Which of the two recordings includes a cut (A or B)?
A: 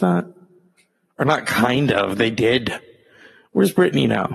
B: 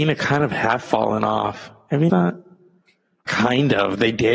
B